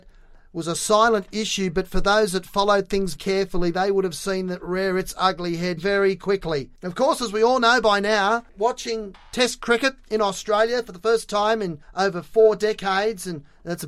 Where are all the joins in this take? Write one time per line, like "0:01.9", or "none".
0:03.1
0:05.8
0:11.8